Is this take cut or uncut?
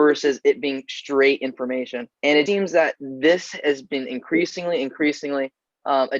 cut